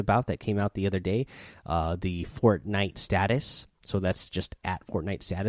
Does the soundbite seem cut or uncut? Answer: uncut